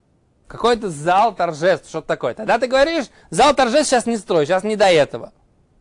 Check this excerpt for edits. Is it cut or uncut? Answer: uncut